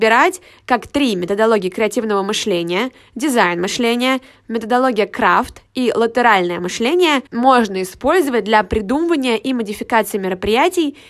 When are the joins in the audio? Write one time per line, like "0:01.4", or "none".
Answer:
0:07.3

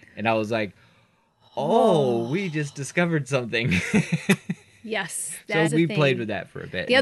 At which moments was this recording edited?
0:05.6

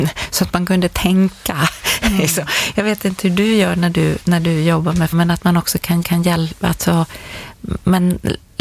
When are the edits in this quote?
0:05.1
0:06.0

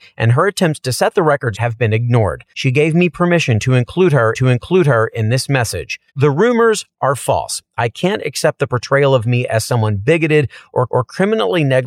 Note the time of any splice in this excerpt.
0:01.5
0:02.5
0:04.3
0:06.1
0:10.9

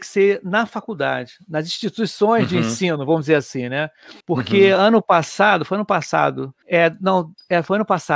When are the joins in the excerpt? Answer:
0:04.2
0:06.6

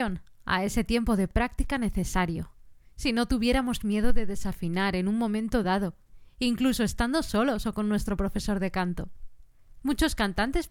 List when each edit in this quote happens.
none

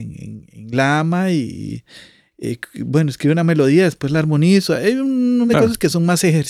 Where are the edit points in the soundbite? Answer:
0:05.5

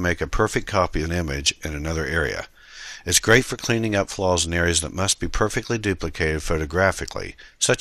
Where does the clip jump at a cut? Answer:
0:01.0

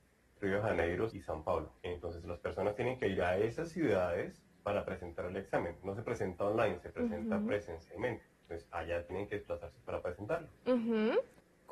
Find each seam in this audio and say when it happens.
0:01.1
0:01.8
0:04.5
0:08.3
0:10.6

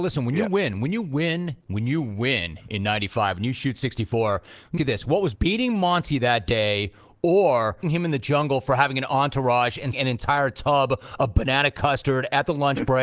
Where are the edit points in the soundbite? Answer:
0:04.8
0:05.4
0:07.8
0:09.9

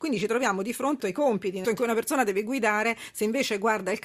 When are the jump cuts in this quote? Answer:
0:01.0
0:01.6

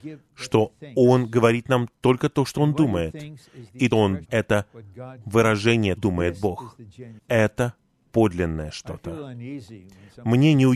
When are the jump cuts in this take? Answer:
0:03.9
0:04.2
0:06.0
0:07.2

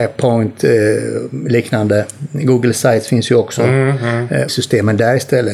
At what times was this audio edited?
0:04.5

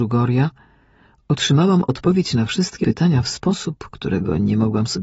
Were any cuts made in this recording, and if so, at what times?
0:02.8

